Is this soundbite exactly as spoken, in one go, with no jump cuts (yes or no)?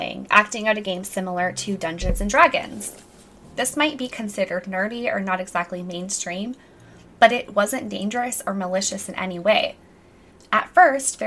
yes